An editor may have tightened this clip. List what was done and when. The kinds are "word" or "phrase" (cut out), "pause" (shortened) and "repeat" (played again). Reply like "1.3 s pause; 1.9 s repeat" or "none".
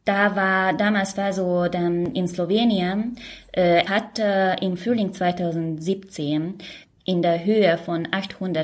3.9 s word